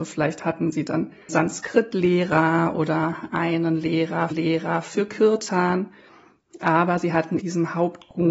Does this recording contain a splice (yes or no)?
yes